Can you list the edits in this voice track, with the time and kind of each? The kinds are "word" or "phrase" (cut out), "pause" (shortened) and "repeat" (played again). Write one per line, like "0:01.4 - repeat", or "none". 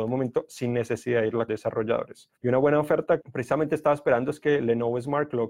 0:01.5 - word
0:02.4 - pause
0:03.2 - word